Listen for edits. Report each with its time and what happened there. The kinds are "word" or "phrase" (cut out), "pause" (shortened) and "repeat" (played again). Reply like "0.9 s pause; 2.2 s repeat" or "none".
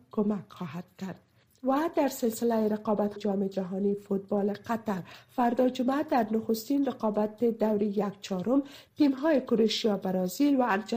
3.2 s word